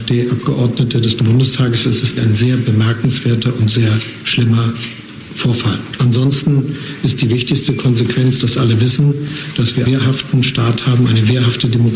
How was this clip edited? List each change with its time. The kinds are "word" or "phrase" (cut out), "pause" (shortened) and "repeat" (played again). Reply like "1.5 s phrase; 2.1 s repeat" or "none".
1.2 s word; 2.2 s word; 9.8 s word